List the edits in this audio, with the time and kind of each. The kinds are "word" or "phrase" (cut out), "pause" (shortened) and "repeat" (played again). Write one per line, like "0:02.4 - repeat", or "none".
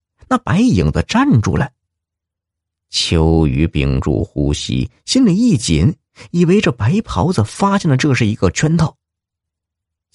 none